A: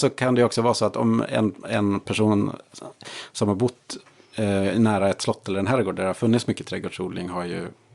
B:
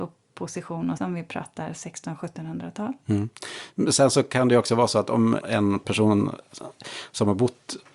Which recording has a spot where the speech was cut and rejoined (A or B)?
B